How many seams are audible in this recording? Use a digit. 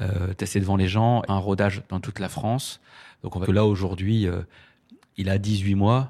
2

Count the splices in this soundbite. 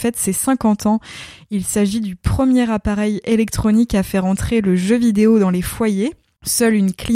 0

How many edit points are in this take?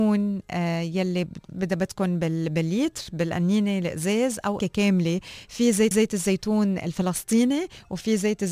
2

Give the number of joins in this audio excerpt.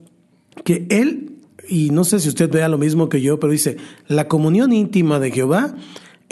0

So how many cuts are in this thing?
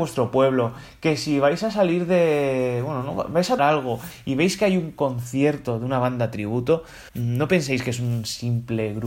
2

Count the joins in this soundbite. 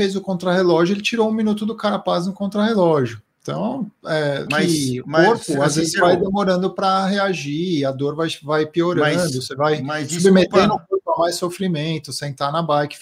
2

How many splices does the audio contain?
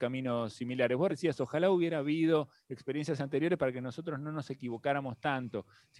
1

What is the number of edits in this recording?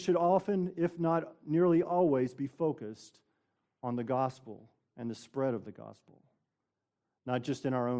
0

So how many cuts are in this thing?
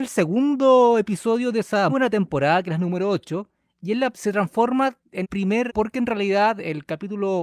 4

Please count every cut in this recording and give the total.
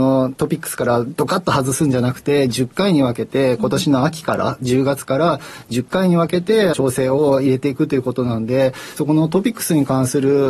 2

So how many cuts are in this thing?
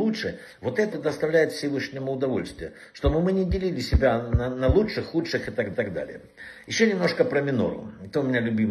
2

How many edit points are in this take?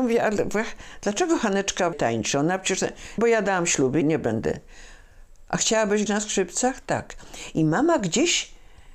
4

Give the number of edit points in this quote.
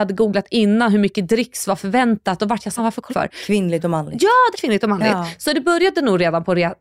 3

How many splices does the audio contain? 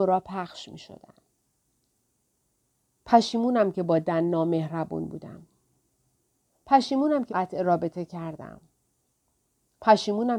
1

